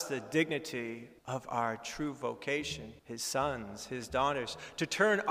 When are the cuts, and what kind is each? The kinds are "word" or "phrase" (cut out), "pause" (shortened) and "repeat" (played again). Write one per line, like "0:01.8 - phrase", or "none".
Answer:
0:01.2 - pause
0:03.0 - pause